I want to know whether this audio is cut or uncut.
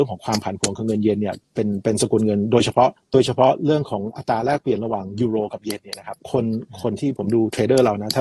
cut